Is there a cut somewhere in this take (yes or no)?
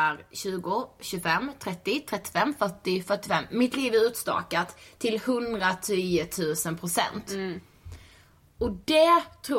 no